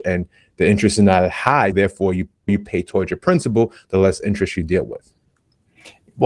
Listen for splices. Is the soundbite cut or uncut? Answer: cut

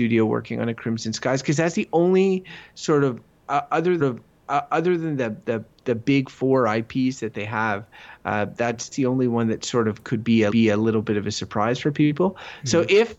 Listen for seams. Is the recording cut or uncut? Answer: cut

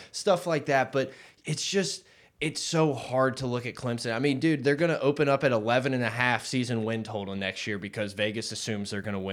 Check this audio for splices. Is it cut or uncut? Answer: uncut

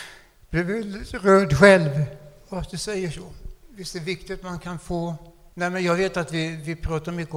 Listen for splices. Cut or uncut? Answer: cut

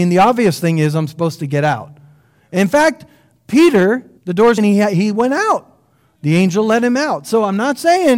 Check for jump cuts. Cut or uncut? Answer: cut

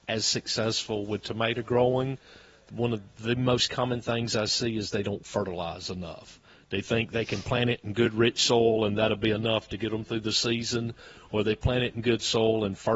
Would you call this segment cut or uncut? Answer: uncut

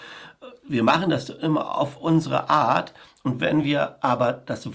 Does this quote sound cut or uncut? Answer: uncut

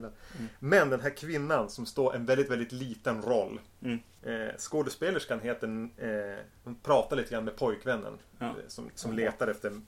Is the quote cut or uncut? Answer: uncut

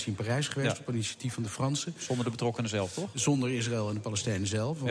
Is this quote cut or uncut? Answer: uncut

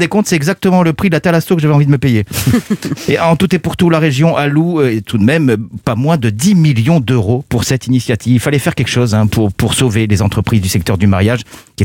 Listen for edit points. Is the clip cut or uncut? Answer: uncut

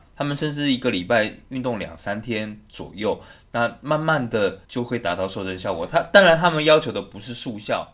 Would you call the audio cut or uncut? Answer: cut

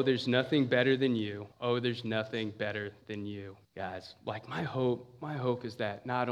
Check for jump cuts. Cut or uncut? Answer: cut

